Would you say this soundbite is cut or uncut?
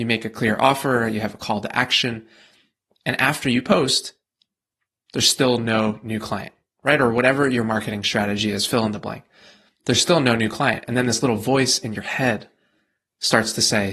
uncut